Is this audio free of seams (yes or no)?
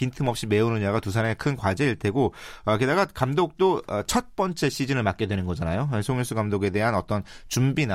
yes